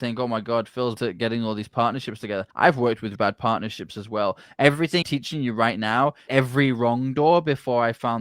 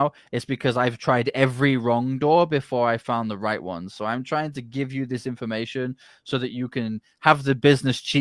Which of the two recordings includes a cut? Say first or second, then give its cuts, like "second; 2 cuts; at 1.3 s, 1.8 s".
first; 5 cuts; at 1.0 s, 2.5 s, 3.1 s, 5.0 s, 6.3 s